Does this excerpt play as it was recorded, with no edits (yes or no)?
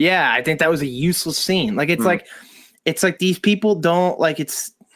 yes